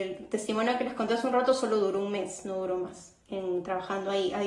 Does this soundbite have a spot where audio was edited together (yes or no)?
no